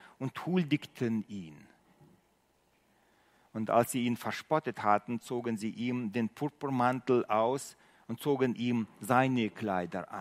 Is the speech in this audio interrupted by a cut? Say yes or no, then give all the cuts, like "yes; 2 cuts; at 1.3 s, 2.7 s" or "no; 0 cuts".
no; 0 cuts